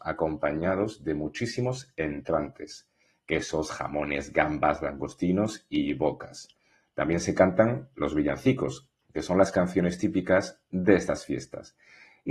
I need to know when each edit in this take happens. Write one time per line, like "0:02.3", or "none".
none